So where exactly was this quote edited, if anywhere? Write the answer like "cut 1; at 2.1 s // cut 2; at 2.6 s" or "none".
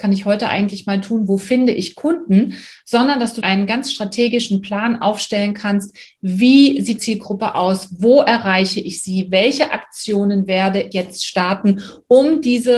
cut 1; at 3.4 s // cut 2; at 7.0 s // cut 3; at 10.9 s